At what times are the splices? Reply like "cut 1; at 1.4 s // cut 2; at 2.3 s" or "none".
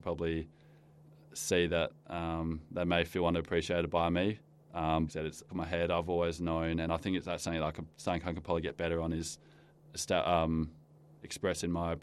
cut 1; at 5.1 s // cut 2; at 5.5 s